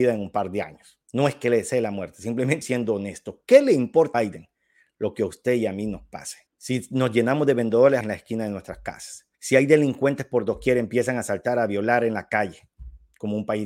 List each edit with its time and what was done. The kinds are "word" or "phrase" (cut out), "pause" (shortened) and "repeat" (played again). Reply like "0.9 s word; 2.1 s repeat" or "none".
1.0 s pause; 2.6 s word; 4.1 s word; 6.5 s pause; 8.0 s word; 9.3 s pause

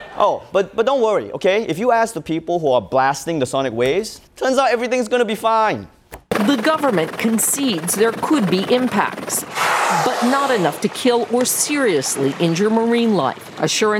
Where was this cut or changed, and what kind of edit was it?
4.3 s pause

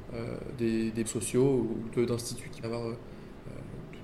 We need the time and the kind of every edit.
1.0 s word; 1.9 s phrase; 2.6 s word

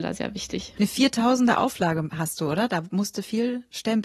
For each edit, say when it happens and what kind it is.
none

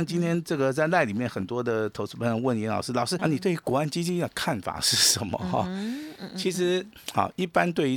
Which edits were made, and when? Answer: 3.2 s word

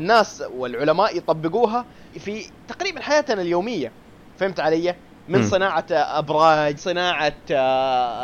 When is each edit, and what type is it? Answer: 2.1 s word; 6.8 s word

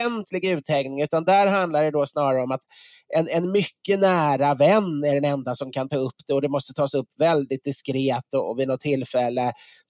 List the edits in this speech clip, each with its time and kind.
none

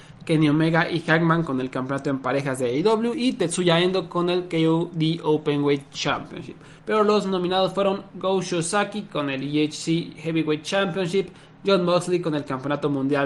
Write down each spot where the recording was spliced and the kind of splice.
6.8 s pause

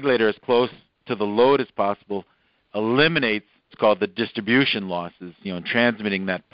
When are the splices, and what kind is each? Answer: 3.7 s word

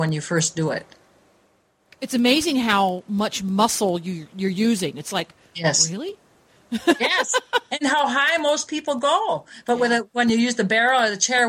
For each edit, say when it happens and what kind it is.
none

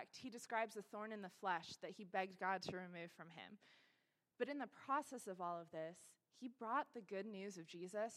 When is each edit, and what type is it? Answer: none

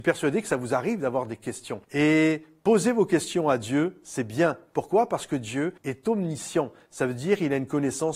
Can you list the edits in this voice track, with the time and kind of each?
1.8 s pause; 5.8 s pause

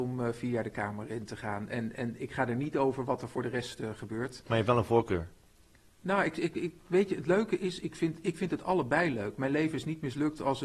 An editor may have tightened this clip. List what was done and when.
none

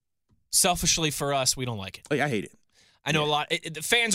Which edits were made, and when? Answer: none

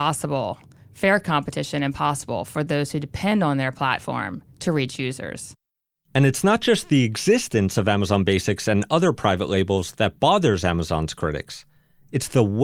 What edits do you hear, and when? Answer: none

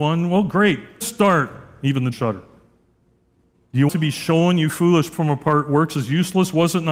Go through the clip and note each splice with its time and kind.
1.0 s phrase; 2.1 s phrase; 3.9 s word; 5.1 s phrase

